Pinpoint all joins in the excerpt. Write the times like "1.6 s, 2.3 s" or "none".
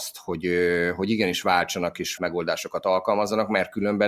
2.2 s